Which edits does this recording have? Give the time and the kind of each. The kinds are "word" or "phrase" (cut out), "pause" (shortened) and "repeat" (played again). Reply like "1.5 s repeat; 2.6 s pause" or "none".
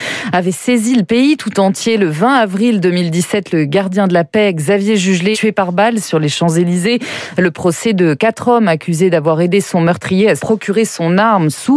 5.3 s word; 10.4 s word